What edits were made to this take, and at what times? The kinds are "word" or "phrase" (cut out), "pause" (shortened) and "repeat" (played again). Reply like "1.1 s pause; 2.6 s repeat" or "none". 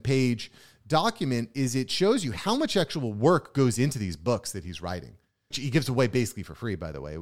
5.5 s word